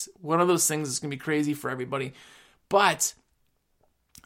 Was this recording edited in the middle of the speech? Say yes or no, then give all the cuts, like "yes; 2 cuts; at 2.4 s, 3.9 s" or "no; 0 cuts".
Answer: no; 0 cuts